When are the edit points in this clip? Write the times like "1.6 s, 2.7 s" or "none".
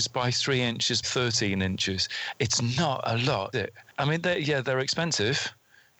1.0 s, 3.5 s